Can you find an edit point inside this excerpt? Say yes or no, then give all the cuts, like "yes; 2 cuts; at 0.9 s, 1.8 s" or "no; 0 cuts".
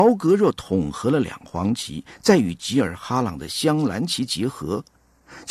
no; 0 cuts